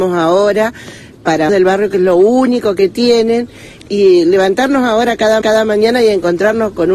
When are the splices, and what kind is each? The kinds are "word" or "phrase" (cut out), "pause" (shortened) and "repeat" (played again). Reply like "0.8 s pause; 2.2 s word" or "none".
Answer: 1.5 s phrase; 3.8 s word; 5.4 s repeat